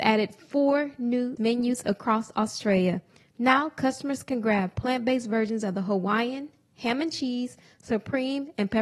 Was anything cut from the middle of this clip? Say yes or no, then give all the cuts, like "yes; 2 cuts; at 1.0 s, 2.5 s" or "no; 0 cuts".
yes; 1 cut; at 1.4 s